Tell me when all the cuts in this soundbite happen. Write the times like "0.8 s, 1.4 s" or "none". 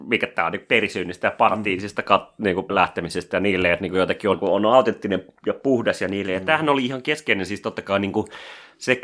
2.7 s, 4.3 s